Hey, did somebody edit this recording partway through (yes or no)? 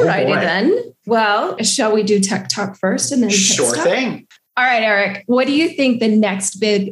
no